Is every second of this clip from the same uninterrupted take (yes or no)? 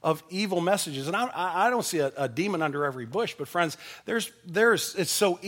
yes